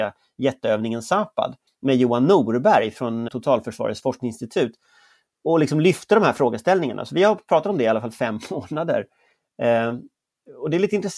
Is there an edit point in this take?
yes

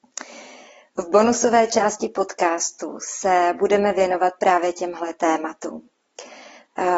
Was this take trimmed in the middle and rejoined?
no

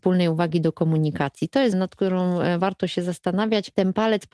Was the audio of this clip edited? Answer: yes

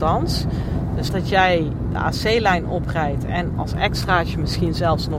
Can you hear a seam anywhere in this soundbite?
yes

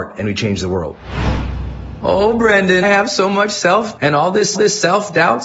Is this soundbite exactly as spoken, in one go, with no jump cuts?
no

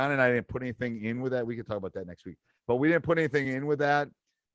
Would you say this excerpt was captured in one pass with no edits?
yes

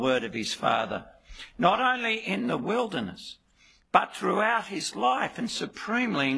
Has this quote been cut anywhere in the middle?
no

